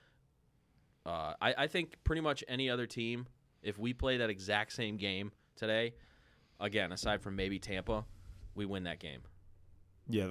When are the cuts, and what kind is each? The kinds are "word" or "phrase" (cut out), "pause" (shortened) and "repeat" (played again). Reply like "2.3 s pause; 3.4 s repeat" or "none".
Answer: none